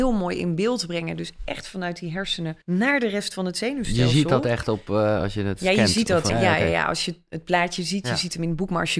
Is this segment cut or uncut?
cut